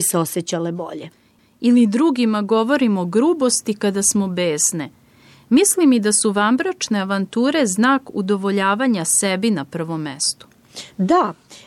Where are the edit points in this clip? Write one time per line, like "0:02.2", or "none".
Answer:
none